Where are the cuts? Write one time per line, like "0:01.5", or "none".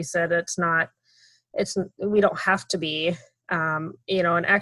none